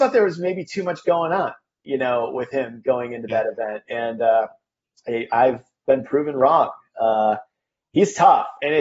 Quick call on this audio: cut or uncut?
uncut